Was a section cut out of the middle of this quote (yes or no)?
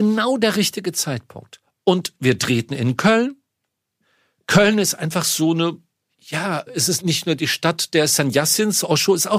no